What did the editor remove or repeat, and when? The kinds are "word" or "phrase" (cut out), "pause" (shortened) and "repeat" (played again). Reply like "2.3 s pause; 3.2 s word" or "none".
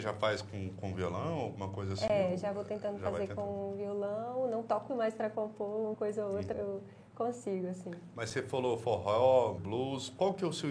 4.9 s word; 5.9 s word; 6.5 s word; 9.6 s word